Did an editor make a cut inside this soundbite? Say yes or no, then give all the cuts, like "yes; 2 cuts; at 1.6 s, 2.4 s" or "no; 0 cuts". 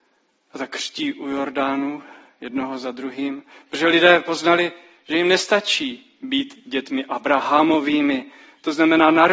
no; 0 cuts